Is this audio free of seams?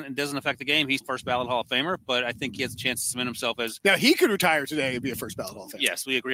no; 1 cut; at 1.0 s

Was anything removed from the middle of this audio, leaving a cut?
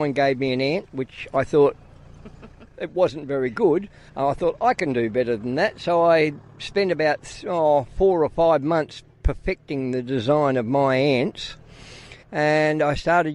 yes; 3 cuts; at 4.1 s, 9.1 s, 12.2 s

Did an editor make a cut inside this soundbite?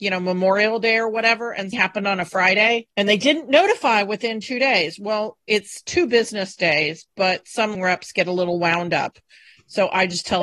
yes; 2 cuts; at 1.7 s, 7.7 s

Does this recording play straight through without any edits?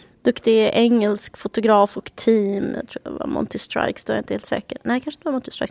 yes; 0 cuts

